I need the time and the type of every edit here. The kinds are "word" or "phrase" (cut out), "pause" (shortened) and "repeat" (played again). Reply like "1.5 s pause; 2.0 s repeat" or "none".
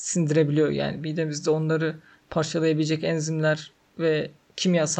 none